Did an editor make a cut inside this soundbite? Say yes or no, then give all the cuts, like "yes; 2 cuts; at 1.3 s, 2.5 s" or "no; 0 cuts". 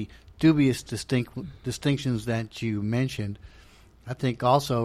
no; 0 cuts